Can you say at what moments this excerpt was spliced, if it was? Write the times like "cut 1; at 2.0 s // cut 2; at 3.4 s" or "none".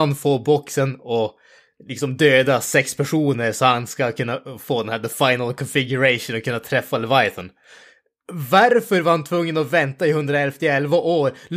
none